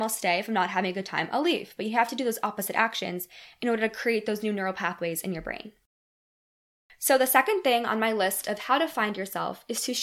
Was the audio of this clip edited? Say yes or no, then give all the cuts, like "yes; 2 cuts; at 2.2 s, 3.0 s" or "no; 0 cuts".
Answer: no; 0 cuts